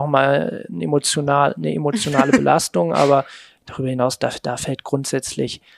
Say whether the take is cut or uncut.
uncut